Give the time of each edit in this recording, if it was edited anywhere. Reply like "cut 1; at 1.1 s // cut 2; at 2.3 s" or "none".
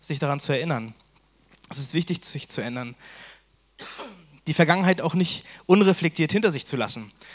none